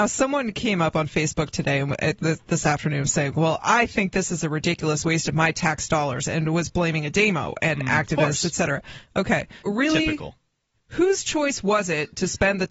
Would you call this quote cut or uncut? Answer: cut